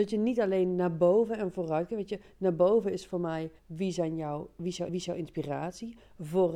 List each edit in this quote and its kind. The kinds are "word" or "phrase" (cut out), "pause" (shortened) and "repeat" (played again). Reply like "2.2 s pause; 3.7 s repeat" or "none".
3.6 s pause; 4.9 s repeat